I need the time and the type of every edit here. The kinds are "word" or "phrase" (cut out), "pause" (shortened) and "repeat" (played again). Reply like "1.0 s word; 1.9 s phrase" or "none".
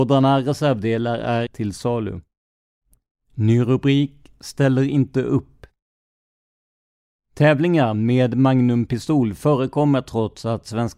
1.5 s word; 2.8 s pause